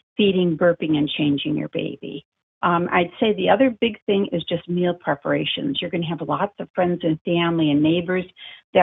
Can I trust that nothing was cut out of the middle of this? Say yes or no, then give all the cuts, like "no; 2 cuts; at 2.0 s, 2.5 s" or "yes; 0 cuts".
yes; 0 cuts